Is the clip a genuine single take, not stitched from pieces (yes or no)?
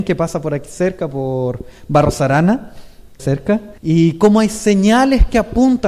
no